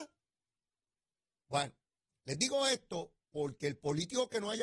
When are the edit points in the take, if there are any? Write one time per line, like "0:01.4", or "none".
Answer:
none